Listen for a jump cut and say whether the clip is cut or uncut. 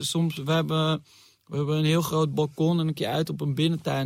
cut